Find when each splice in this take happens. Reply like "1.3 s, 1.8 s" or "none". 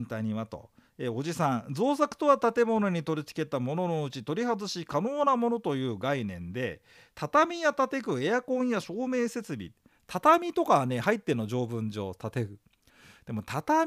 none